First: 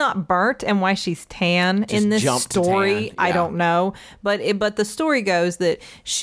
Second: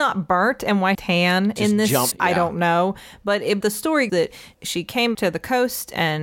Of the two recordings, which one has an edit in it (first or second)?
second